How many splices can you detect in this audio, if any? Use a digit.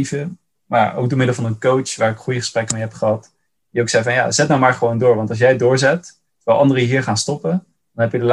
0